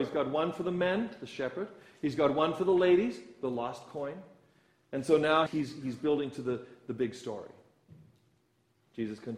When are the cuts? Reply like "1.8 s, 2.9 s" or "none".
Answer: 5.5 s